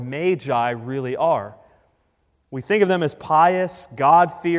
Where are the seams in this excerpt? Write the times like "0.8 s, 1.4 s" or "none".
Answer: none